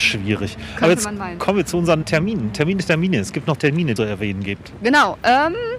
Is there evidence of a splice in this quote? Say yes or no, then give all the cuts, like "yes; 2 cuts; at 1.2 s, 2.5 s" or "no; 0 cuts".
yes; 3 cuts; at 2.0 s, 3.6 s, 4.0 s